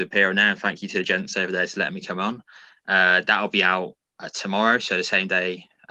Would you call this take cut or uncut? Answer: uncut